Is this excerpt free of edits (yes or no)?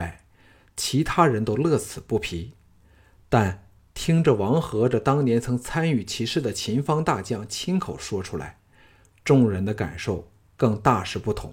yes